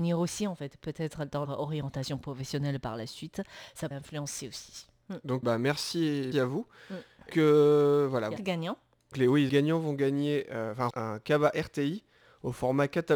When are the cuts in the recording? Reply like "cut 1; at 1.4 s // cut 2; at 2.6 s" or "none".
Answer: cut 1; at 1.4 s // cut 2; at 3.9 s // cut 3; at 5.4 s // cut 4; at 6.3 s // cut 5; at 7.3 s // cut 6; at 8.4 s // cut 7; at 9.1 s // cut 8; at 9.5 s // cut 9; at 10.9 s